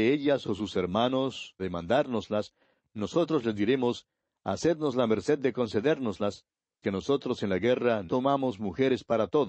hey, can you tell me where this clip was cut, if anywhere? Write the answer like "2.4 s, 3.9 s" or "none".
1.6 s, 6.8 s, 8.1 s